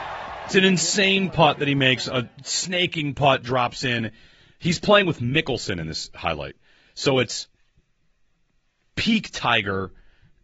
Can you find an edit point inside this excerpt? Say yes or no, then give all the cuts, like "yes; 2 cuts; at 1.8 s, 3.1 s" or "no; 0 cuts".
no; 0 cuts